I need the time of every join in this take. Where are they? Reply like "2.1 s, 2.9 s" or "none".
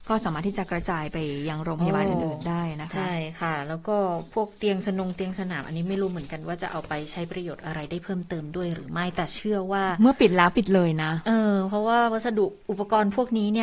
12.6 s